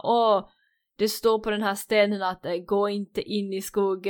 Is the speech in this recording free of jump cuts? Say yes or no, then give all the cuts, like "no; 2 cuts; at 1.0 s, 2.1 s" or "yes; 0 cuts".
yes; 0 cuts